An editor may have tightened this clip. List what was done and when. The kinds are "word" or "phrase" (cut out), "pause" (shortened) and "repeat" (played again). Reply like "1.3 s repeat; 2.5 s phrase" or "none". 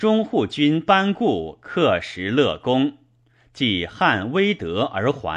none